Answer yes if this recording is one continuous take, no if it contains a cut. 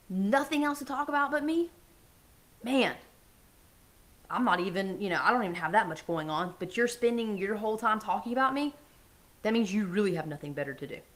yes